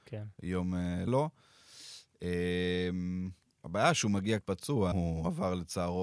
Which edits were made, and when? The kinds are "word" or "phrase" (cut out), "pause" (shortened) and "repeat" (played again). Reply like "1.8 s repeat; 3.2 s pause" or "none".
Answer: 1.1 s word; 3.5 s pause; 4.4 s word; 4.9 s word